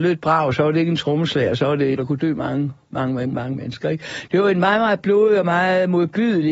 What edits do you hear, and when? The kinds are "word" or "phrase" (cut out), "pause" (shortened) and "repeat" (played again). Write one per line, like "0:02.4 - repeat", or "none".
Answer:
0:01.9 - phrase
0:03.3 - word